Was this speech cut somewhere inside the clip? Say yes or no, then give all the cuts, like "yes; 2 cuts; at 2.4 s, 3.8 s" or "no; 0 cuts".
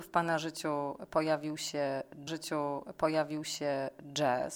yes; 1 cut; at 2.3 s